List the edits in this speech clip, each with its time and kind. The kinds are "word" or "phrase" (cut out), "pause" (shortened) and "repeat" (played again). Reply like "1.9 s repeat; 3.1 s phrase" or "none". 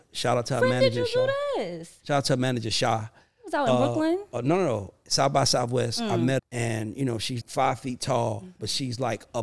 6.4 s word; 7.4 s word